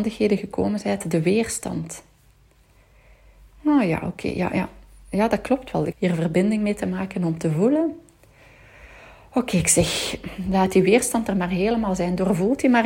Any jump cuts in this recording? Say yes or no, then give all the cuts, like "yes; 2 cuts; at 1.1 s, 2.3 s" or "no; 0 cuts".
yes; 1 cut; at 5.9 s